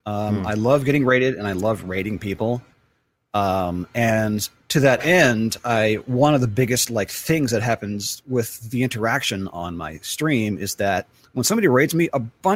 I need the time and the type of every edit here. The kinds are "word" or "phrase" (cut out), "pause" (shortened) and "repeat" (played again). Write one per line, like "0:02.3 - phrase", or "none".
none